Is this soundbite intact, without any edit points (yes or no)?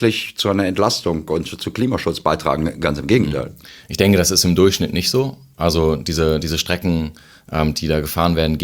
yes